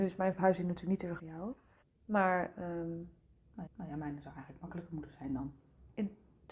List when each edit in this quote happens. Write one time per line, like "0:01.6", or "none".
0:01.2
0:01.8
0:03.7